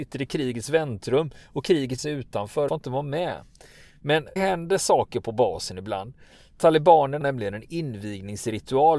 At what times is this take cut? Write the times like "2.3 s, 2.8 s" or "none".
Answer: 2.0 s, 2.7 s, 4.4 s, 7.2 s